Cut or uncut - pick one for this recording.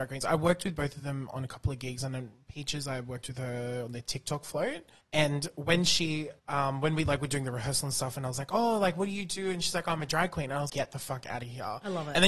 cut